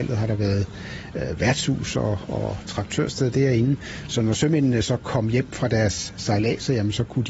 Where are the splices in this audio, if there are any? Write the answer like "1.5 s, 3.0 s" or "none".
none